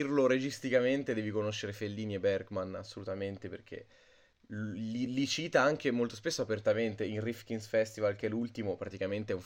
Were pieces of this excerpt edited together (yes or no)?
no